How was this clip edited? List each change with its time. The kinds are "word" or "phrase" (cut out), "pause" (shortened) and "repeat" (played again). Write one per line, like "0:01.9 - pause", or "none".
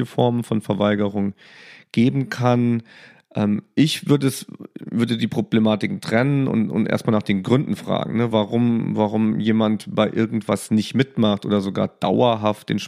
none